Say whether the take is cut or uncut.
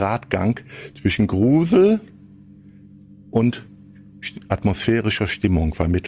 uncut